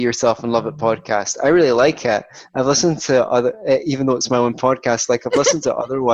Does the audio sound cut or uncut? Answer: uncut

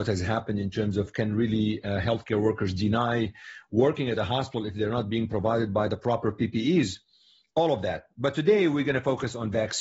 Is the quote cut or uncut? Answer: uncut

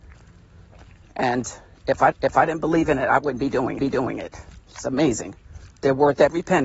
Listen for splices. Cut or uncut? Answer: cut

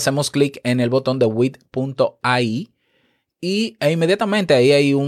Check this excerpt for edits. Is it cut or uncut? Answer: uncut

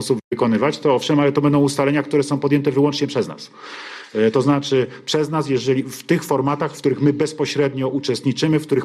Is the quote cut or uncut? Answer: uncut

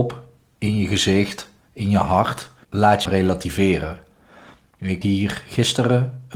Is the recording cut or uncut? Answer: cut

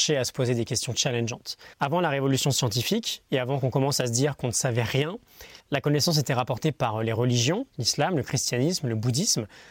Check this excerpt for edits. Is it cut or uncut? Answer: cut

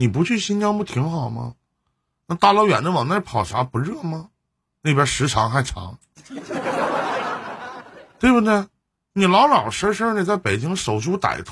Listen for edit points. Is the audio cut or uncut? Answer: uncut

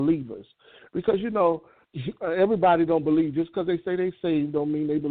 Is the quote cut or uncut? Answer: uncut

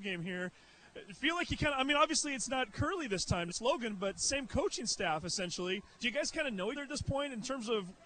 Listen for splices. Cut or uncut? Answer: cut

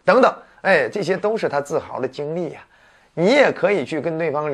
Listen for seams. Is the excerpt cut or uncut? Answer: uncut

